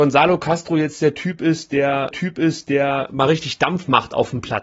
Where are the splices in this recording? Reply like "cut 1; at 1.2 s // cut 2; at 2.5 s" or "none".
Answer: cut 1; at 2.1 s